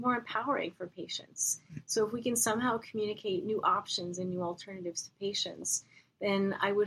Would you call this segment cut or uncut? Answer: uncut